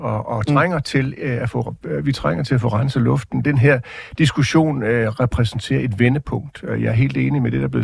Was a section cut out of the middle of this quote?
no; 0 cuts

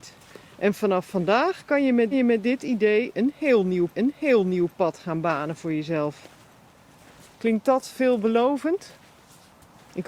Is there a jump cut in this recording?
yes; 2 cuts; at 2.1 s, 3.9 s

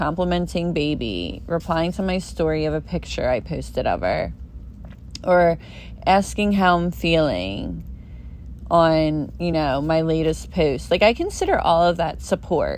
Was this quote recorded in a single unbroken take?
yes; 0 cuts

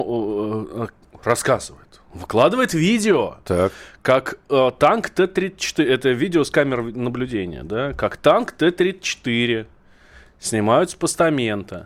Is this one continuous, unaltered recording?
yes; 0 cuts

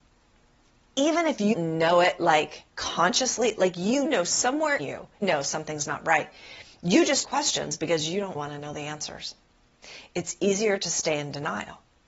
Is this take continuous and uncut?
no; 7 cuts; at 1.5 s, 2.7 s, 4.1 s, 4.8 s, 5.2 s, 7.2 s, 8.3 s

